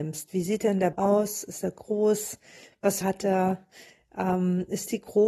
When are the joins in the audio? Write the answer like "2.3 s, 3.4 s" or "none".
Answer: 0.9 s, 3.0 s

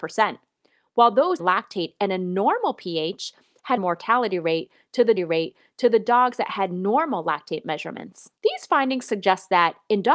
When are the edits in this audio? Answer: 1.4 s, 3.8 s, 5.2 s, 8.4 s

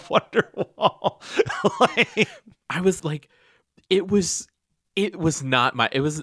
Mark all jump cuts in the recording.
3.0 s

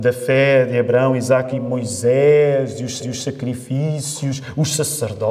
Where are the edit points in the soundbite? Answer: 1.5 s, 3.0 s

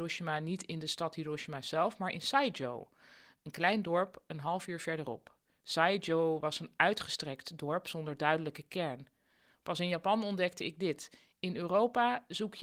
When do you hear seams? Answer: none

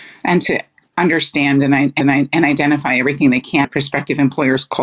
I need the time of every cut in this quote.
2.0 s, 3.6 s

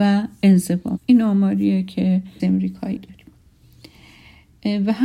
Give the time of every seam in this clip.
1.0 s, 2.4 s, 3.0 s

